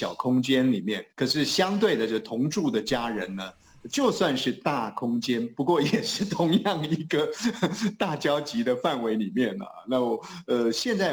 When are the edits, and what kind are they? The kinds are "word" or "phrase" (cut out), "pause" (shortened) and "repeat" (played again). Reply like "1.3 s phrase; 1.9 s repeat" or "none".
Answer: 1.1 s pause